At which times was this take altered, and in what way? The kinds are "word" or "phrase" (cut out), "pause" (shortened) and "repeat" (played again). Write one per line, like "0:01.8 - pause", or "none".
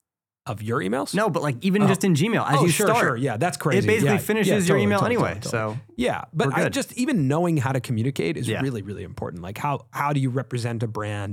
none